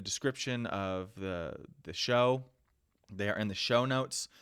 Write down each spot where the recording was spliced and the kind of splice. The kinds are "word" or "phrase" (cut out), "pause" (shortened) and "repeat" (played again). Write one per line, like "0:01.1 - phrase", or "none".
none